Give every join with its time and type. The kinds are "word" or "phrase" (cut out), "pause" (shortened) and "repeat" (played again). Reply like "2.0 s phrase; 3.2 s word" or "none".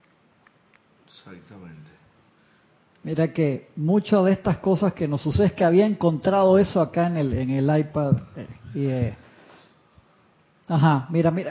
none